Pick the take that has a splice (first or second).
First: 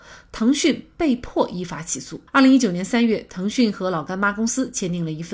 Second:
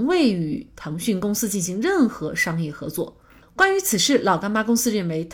first